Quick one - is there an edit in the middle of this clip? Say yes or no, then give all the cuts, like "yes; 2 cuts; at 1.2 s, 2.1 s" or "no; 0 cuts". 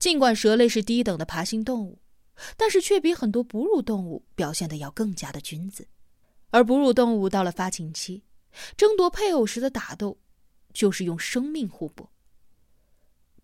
yes; 1 cut; at 6.2 s